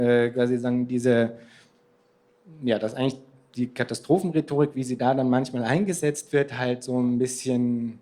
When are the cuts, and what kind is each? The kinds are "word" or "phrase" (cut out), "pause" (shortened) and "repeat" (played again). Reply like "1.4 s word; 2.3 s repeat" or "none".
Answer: none